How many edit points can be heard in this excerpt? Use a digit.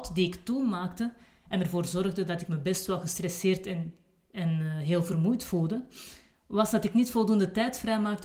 0